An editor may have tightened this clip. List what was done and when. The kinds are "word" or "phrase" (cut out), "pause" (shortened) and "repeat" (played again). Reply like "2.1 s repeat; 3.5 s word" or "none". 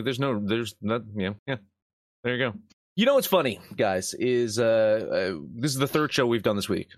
1.4 s pause; 2.7 s pause